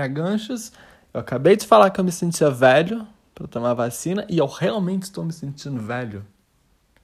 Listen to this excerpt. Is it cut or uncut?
uncut